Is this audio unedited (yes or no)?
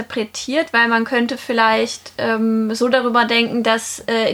yes